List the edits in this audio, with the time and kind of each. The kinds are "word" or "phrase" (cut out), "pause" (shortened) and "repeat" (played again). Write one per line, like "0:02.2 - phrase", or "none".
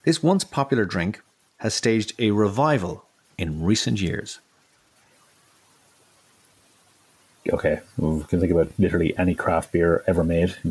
none